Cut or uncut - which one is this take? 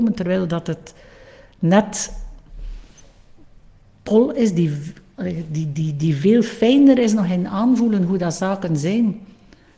uncut